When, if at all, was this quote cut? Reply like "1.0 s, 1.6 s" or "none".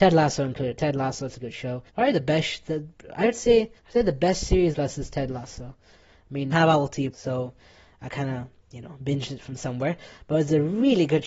1.4 s, 1.9 s, 3.8 s, 4.7 s, 6.5 s, 7.1 s